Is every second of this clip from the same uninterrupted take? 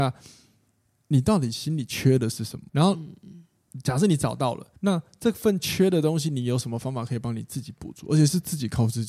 no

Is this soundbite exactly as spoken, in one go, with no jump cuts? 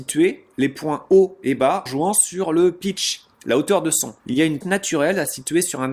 no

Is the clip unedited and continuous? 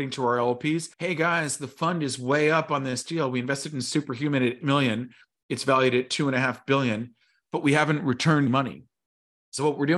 no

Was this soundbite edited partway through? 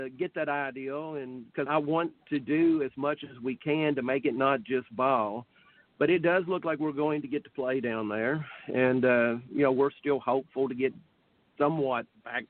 yes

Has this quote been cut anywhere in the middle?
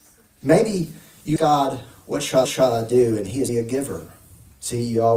yes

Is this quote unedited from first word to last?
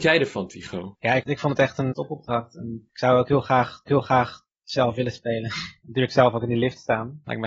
no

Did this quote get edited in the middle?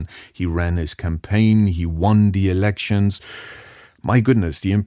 no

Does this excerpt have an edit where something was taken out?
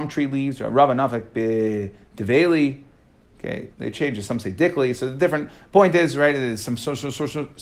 yes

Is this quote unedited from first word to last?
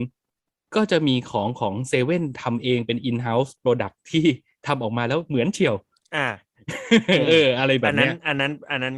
yes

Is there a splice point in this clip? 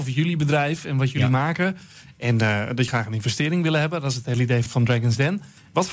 yes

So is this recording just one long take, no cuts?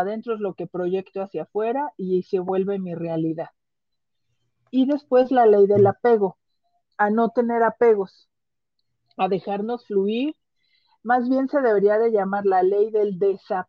yes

